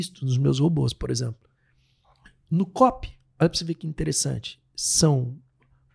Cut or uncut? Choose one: uncut